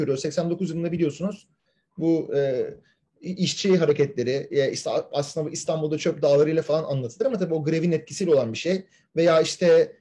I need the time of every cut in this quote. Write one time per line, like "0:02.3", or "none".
none